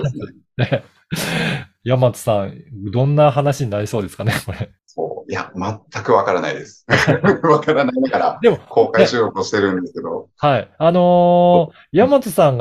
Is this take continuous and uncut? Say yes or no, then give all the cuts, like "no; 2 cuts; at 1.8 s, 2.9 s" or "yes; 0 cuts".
no; 1 cut; at 4.8 s